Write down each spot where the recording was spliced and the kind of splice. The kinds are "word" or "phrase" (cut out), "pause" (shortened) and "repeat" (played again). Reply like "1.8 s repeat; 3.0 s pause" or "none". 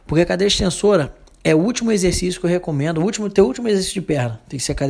none